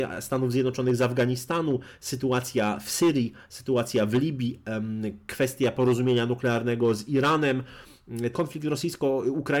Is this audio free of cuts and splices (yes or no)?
no